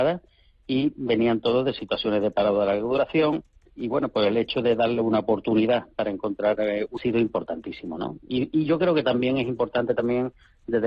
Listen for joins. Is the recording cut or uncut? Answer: cut